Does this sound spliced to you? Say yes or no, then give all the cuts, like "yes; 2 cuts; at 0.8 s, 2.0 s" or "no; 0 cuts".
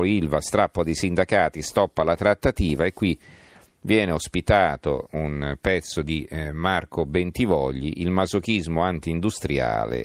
no; 0 cuts